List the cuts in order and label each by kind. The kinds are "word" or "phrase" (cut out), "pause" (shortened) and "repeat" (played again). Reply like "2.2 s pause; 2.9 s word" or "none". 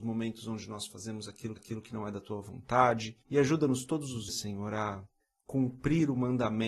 1.6 s repeat; 3.2 s pause; 4.3 s word; 5.2 s pause